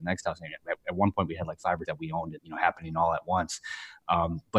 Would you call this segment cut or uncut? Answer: cut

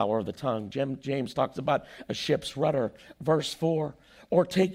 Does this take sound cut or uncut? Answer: uncut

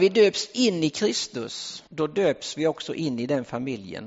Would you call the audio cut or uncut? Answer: cut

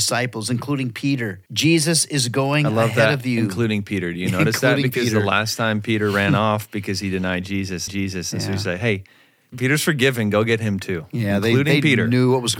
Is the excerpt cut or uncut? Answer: cut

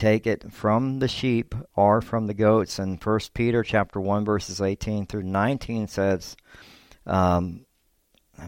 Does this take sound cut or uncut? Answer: uncut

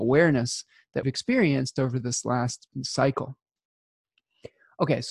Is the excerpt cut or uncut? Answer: cut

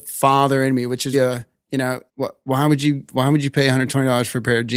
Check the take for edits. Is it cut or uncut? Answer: cut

